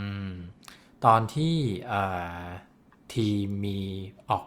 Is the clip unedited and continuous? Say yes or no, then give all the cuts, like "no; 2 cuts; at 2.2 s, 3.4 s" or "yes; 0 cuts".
yes; 0 cuts